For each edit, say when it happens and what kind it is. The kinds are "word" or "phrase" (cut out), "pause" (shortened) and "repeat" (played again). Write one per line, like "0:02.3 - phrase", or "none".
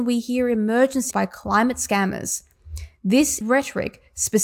0:01.1 - word
0:03.4 - word